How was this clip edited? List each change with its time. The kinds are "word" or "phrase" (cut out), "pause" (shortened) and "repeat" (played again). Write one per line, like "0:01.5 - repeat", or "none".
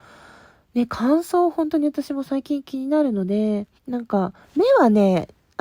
0:03.8 - pause